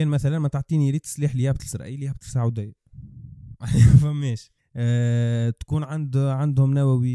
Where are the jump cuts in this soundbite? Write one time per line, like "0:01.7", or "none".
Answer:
0:04.6